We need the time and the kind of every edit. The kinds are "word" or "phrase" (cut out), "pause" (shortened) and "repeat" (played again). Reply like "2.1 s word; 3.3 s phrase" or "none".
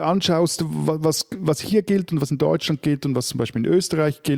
none